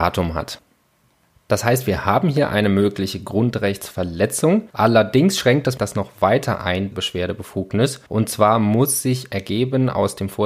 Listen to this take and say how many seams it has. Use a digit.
4